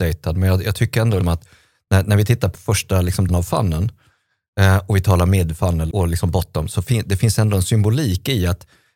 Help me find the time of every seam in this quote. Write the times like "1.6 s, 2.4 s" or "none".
1.2 s, 2.5 s, 3.3 s, 5.9 s